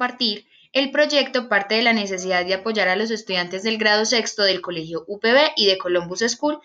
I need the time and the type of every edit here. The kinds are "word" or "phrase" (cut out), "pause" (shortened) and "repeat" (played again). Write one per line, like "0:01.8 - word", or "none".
none